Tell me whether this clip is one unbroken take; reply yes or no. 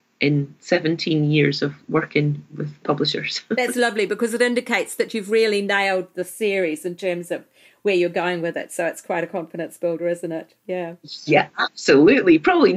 yes